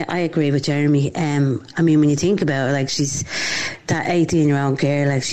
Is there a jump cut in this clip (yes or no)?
no